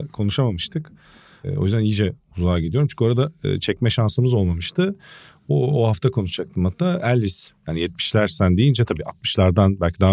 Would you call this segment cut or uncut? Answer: uncut